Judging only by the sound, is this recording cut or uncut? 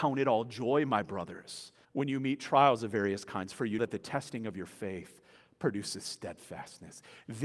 cut